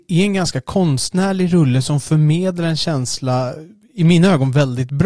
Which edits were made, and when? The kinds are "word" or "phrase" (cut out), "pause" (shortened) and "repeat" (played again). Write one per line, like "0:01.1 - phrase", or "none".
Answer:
none

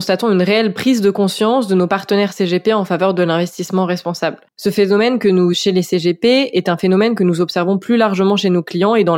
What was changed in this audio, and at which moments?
0:05.5 - word

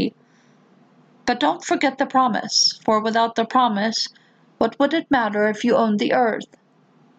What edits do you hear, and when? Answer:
none

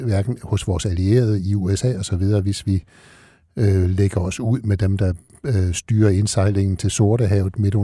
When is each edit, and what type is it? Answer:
none

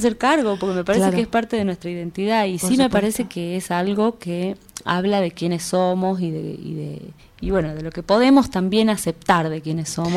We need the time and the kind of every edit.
0:07.2 - pause

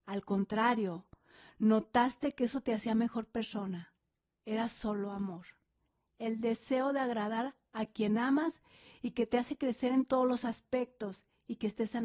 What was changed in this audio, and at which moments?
none

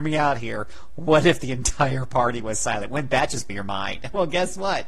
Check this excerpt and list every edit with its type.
0:03.5 - word

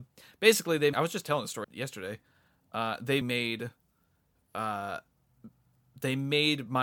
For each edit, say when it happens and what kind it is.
0:00.9 - word
0:01.6 - word
0:03.2 - word

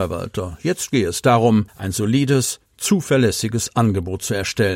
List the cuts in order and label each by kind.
0:01.7 - pause

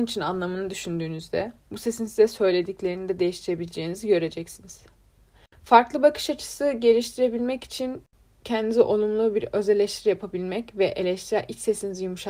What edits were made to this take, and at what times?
none

